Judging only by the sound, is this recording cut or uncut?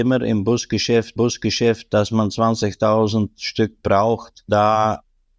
cut